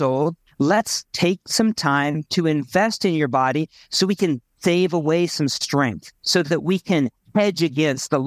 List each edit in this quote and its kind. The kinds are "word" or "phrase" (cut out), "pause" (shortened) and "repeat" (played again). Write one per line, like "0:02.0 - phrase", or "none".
none